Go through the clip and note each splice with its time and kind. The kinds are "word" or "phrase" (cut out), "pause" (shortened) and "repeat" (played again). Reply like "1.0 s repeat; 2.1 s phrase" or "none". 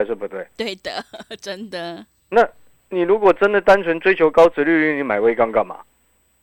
2.2 s pause